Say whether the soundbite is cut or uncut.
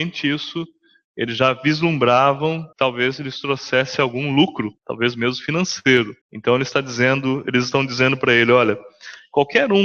cut